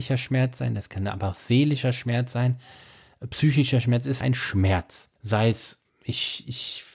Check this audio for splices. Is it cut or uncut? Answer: cut